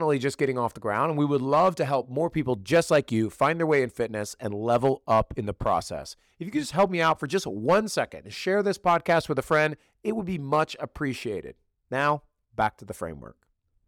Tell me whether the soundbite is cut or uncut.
uncut